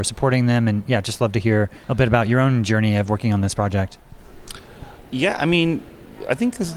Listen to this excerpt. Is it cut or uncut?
cut